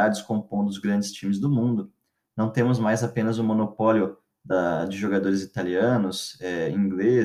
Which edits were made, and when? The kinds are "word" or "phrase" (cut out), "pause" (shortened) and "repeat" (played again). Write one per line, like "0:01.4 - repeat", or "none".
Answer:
none